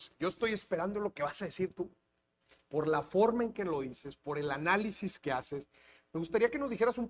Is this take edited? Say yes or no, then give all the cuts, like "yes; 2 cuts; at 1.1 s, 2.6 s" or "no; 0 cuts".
no; 0 cuts